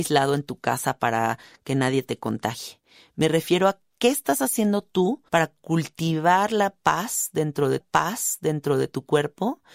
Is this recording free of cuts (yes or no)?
no